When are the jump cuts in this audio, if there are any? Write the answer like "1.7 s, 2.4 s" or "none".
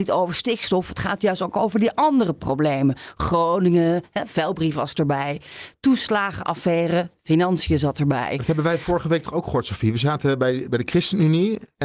none